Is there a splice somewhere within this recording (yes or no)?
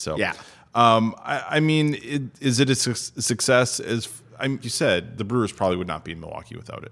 yes